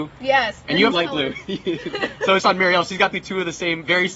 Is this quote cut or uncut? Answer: cut